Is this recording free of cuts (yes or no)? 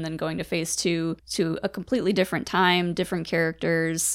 no